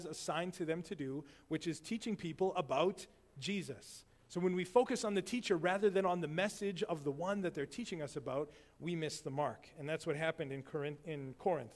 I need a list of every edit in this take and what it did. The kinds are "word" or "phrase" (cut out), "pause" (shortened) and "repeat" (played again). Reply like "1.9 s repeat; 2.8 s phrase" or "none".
none